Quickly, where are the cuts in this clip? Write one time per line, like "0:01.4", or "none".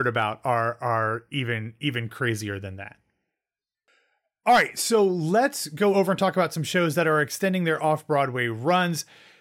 none